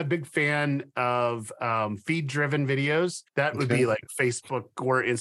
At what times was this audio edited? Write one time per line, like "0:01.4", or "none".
0:03.3